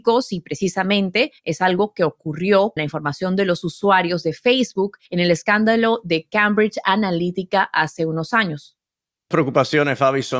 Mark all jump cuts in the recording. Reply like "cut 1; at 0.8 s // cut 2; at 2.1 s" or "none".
cut 1; at 1.4 s // cut 2; at 2.8 s // cut 3; at 5.0 s // cut 4; at 9.3 s